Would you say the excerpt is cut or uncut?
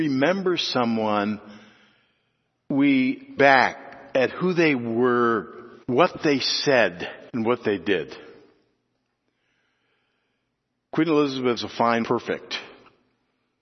cut